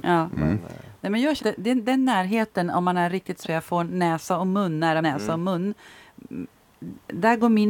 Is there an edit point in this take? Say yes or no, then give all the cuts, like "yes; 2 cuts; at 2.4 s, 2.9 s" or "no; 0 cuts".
yes; 3 cuts; at 1.4 s, 3.4 s, 5.0 s